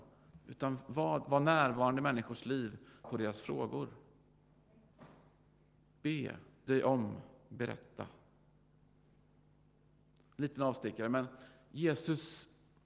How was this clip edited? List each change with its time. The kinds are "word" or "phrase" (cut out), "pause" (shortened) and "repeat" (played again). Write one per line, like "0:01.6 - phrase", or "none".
0:03.0 - word
0:06.7 - word